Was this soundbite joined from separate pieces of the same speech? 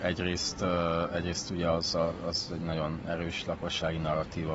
no; 0 cuts

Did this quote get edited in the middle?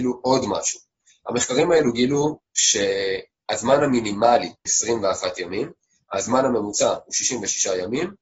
yes; 1 cut; at 4.7 s

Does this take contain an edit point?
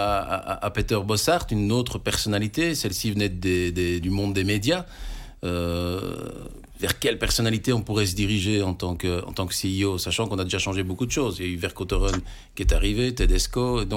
yes; 1 cut; at 4.0 s

